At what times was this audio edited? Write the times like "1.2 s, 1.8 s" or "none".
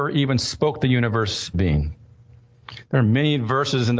1.5 s